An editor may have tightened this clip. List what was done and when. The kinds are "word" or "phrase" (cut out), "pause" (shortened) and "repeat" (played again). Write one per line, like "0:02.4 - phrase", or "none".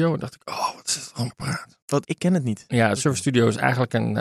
0:01.3 - word
0:02.0 - word
0:03.0 - word